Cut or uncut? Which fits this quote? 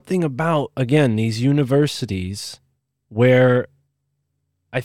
uncut